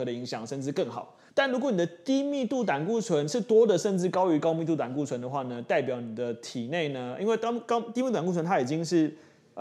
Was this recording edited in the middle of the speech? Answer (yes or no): yes